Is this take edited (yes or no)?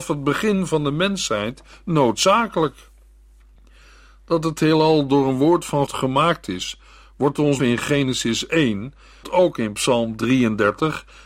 yes